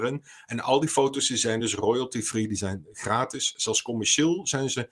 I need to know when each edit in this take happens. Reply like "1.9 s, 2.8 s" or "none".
none

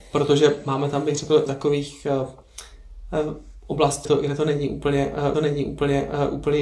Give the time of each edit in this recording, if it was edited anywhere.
1.5 s, 4.0 s, 5.3 s

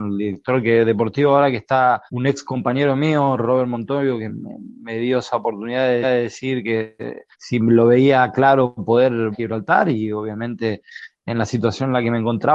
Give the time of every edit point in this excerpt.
2.1 s, 4.3 s, 6.0 s, 7.3 s, 9.3 s

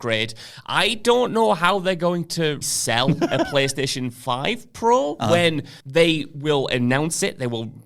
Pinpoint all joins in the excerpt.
2.6 s, 5.8 s

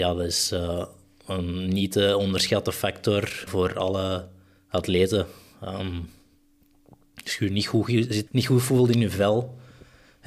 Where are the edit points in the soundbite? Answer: 3.5 s, 8.3 s

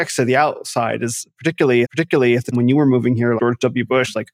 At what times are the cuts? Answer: 1.8 s, 2.5 s, 3.4 s

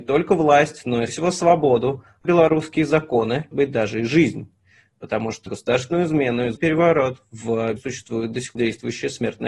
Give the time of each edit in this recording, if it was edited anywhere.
1.1 s, 2.2 s, 3.5 s, 5.5 s, 6.6 s, 7.8 s, 8.6 s

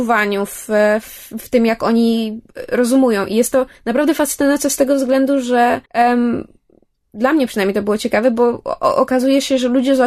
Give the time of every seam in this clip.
3.7 s, 5.9 s

